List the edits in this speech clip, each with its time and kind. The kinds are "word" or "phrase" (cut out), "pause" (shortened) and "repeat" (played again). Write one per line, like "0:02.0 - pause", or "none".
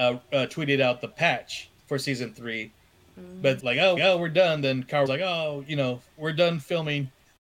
0:01.8 - pause
0:03.6 - word
0:04.0 - repeat
0:05.1 - word
0:06.1 - pause